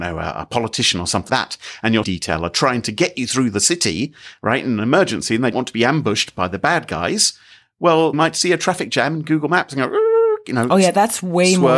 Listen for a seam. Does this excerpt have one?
yes; 4 cuts; at 1.3 s, 2.0 s, 5.5 s, 8.1 s

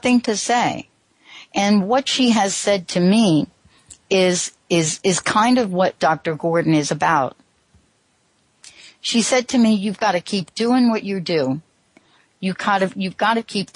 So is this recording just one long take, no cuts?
yes; 0 cuts

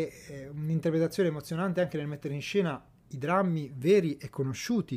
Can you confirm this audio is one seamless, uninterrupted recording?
yes; 0 cuts

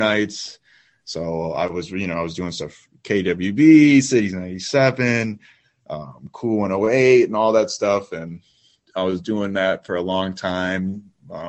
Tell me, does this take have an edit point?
no; 0 cuts

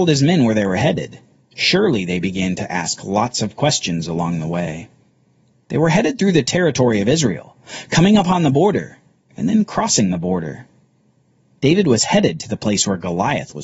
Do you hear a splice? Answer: no; 0 cuts

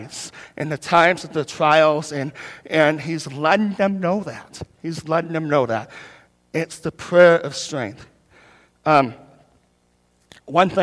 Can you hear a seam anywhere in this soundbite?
no; 0 cuts

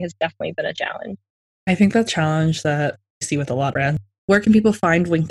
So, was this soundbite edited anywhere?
yes; 3 cuts; at 2.1 s, 3.2 s, 3.7 s

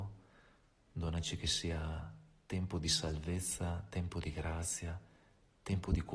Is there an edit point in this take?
no; 0 cuts

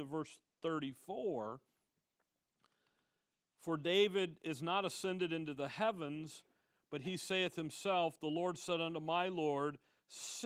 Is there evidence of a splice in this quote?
no; 0 cuts

